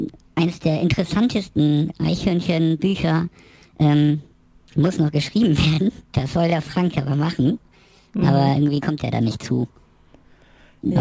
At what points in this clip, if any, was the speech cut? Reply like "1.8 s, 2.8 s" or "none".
none